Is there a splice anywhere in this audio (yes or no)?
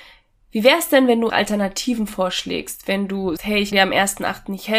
yes